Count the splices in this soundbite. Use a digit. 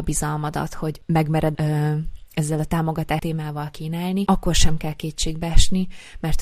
2